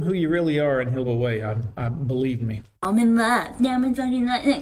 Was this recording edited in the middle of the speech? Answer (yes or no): yes